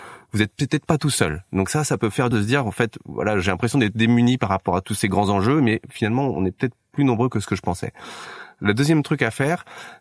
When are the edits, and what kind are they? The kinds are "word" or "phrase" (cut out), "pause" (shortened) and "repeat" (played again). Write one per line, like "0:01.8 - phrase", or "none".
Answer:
0:02.3 - word